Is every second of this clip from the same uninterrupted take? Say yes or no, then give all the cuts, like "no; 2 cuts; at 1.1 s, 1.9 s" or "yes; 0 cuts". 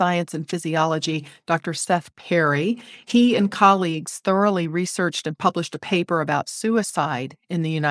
yes; 0 cuts